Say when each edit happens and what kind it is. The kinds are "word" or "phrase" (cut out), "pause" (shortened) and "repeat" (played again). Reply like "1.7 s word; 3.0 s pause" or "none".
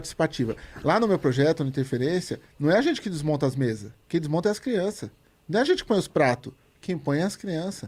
2.5 s pause; 4.0 s pause